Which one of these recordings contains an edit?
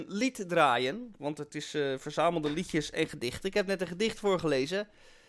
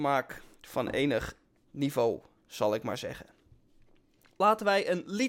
second; 1 cut; at 1.6 s

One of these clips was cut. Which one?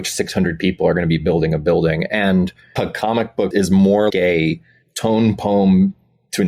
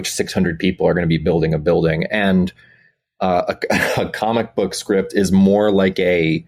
first; 3 cuts; at 2.8 s, 3.5 s, 4.1 s

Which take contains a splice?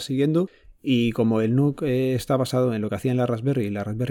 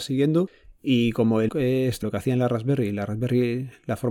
second; 2 cuts; at 1.5 s, 2.0 s

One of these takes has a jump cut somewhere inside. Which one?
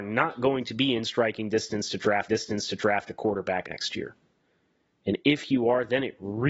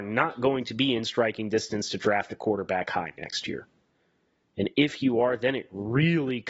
first; 2 cuts; at 2.3 s, 3.6 s

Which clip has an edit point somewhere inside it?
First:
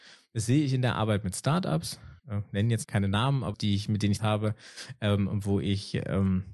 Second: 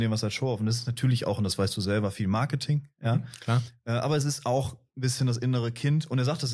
first; 4 cuts; at 2.2 s, 2.8 s, 3.5 s, 4.2 s

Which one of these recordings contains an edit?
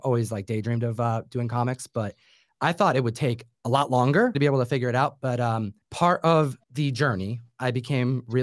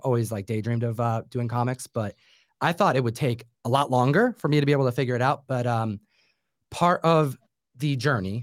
first; 3 cuts; at 4.3 s, 5.8 s, 6.6 s

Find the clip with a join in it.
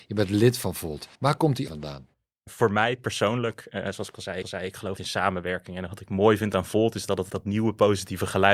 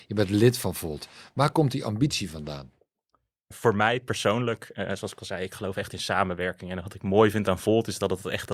first; 6 cuts; at 1.1 s, 1.7 s, 2.1 s, 4.4 s, 5.0 s, 7.3 s

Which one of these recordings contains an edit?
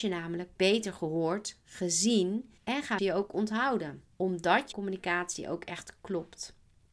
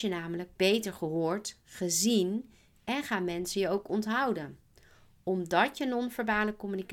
first; 4 cuts; at 2.6 s, 3.0 s, 4.1 s, 4.7 s

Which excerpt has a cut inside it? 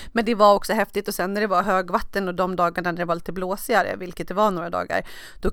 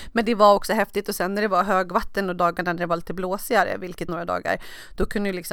second; 2 cuts; at 2.4 s, 4.1 s

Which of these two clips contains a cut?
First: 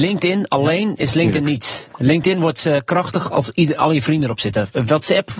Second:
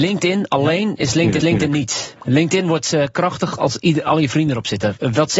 second; 1 cut; at 1.4 s

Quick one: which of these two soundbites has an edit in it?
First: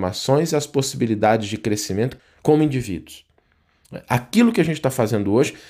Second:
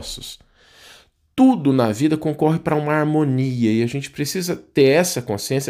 first; 1 cut; at 2.2 s

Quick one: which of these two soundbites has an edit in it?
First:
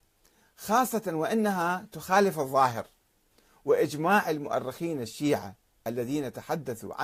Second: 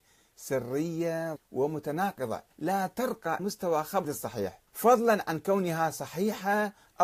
second; 5 cuts; at 1.4 s, 2.5 s, 3.4 s, 4.0 s, 4.7 s

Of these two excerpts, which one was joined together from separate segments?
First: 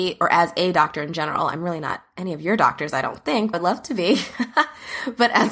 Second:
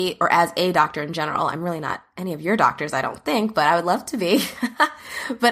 first; 1 cut; at 3.5 s

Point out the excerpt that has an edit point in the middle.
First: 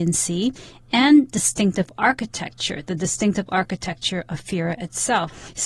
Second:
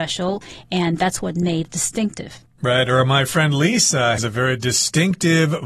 second; 2 cuts; at 1.7 s, 4.2 s

